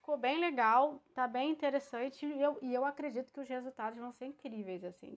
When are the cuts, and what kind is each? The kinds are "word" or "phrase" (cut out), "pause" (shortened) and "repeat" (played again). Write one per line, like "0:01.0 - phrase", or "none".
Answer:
none